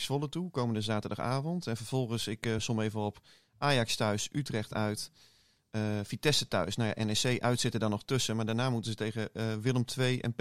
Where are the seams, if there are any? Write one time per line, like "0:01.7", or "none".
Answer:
none